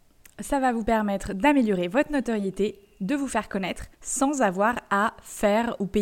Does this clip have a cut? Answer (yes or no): yes